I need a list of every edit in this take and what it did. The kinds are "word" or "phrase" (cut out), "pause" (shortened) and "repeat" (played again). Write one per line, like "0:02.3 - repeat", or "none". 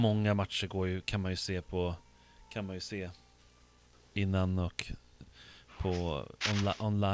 none